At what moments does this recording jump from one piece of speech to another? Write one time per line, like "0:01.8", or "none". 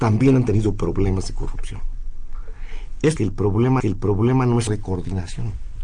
0:03.2
0:03.8
0:04.7